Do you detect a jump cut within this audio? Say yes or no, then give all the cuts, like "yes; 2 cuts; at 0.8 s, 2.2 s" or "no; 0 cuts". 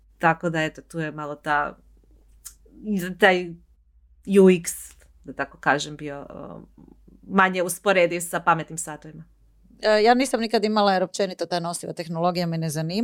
no; 0 cuts